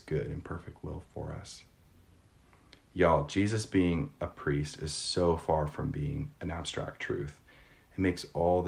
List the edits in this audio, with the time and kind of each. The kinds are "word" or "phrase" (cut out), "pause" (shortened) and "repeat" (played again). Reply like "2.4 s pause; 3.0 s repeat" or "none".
none